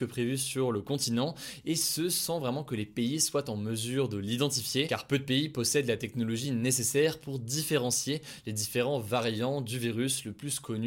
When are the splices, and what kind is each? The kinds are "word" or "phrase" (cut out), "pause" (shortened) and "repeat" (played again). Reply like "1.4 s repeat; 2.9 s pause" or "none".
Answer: none